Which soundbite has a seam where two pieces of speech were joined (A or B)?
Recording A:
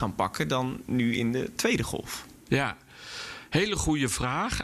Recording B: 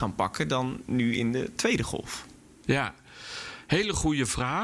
A